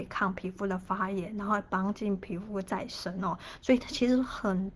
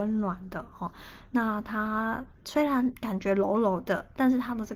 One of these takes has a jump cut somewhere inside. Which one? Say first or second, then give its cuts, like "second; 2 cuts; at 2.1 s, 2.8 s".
second; 1 cut; at 2.3 s